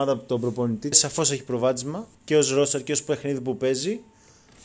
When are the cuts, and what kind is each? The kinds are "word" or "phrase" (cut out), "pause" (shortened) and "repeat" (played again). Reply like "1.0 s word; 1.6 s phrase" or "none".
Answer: 0.9 s phrase; 2.1 s pause

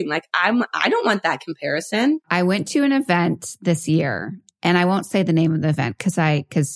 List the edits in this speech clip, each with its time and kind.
2.2 s pause

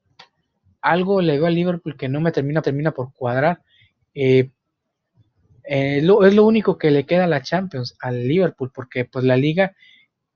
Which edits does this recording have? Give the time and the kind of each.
2.6 s repeat

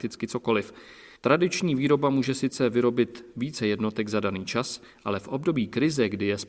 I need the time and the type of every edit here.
1.2 s pause

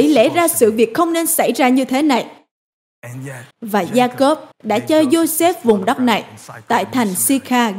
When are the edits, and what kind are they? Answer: 3.5 s pause; 4.5 s pause

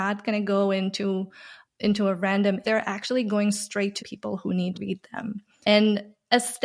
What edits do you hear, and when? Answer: 1.6 s word; 2.6 s word; 4.0 s word; 4.7 s word; 5.6 s word

